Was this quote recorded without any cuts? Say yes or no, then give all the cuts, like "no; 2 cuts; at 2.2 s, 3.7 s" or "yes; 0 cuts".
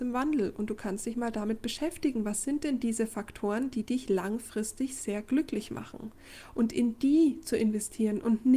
yes; 0 cuts